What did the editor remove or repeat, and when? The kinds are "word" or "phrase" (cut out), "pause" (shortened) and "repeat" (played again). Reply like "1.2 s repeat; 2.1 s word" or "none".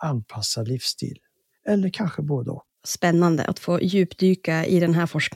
2.7 s pause

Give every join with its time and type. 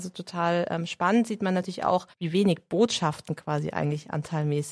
2.1 s pause

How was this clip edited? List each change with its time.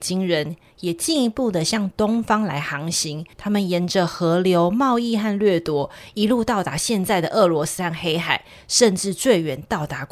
3.3 s pause

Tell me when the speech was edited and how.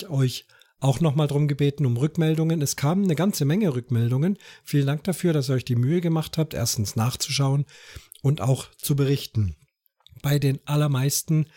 none

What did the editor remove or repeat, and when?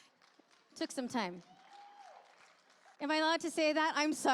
2.9 s pause

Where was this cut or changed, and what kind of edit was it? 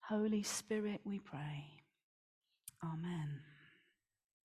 none

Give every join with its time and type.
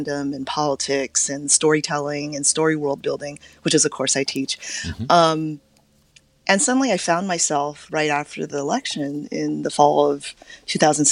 none

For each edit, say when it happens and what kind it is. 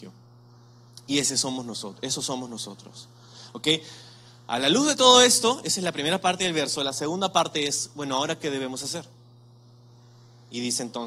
none

